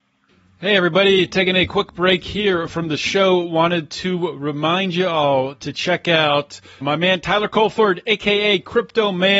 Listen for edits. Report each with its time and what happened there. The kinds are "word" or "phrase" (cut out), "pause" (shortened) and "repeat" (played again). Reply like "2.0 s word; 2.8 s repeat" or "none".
6.8 s word